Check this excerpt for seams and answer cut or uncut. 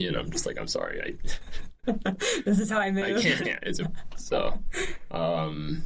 cut